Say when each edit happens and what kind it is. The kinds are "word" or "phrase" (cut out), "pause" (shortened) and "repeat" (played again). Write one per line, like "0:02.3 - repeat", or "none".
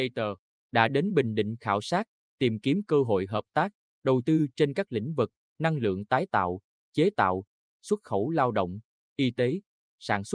none